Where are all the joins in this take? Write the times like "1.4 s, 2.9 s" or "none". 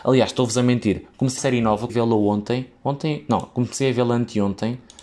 1.4 s, 1.9 s